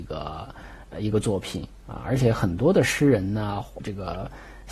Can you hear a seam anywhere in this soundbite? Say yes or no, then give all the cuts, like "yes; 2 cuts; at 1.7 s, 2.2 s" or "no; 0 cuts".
yes; 1 cut; at 3.8 s